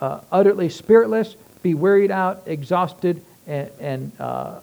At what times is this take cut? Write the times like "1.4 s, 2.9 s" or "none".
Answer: none